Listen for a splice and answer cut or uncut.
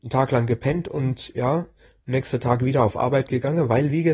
uncut